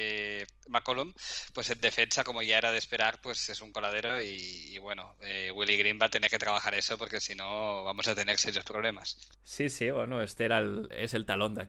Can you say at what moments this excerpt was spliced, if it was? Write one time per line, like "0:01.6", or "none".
0:09.3